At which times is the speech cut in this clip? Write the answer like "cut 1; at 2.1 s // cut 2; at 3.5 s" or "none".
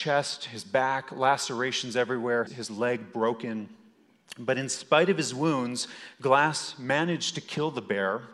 cut 1; at 2.5 s